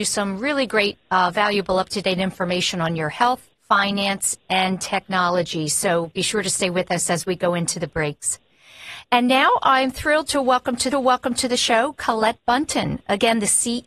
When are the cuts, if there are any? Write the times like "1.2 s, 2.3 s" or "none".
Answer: 3.6 s, 10.9 s